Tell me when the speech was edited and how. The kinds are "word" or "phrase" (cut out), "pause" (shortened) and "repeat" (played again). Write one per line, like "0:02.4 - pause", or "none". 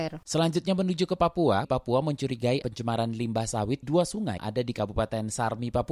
0:01.6 - word
0:02.6 - word
0:03.8 - word
0:04.4 - word